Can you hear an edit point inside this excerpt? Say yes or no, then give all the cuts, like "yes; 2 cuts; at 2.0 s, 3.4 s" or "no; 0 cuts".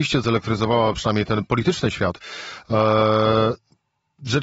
no; 0 cuts